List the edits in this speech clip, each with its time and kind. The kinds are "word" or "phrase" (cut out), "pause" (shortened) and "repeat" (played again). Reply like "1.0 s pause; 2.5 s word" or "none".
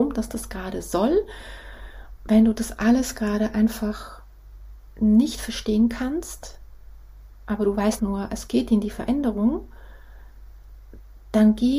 8.0 s word